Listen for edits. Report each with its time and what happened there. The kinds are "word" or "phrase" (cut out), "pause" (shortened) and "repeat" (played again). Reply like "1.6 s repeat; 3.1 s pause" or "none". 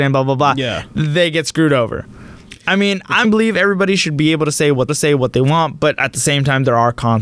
3.2 s phrase; 4.9 s repeat